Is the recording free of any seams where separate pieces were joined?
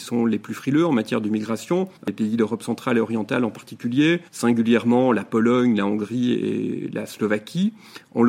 no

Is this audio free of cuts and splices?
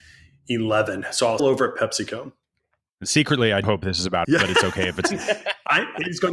no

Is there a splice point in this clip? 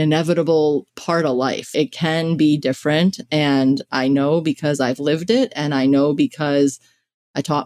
yes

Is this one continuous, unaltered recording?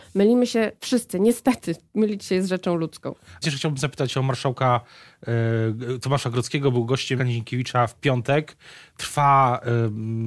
no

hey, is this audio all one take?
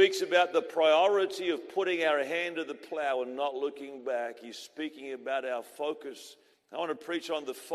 no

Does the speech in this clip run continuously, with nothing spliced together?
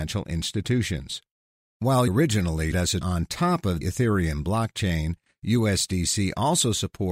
no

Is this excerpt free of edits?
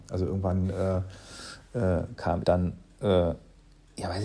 no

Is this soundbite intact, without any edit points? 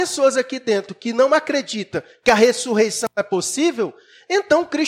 yes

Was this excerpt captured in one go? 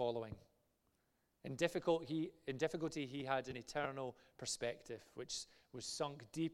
yes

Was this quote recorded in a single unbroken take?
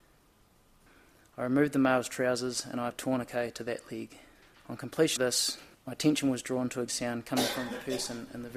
no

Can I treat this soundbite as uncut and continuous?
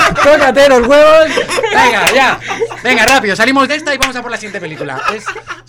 yes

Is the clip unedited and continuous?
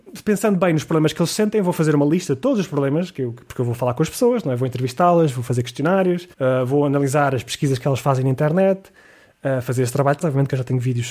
no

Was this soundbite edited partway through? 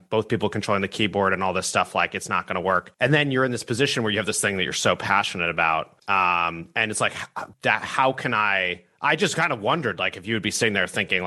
yes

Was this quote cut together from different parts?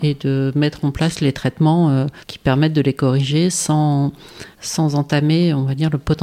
yes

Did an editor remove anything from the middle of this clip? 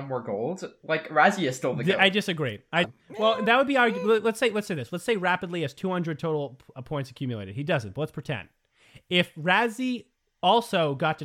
yes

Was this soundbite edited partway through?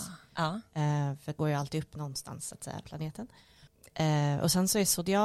yes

